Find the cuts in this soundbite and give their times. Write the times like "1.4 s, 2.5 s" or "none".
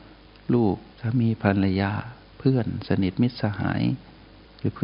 0.9 s